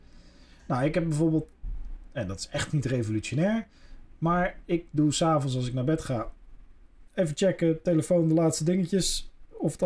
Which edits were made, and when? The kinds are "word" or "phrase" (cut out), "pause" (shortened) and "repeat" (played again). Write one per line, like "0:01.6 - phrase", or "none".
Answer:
none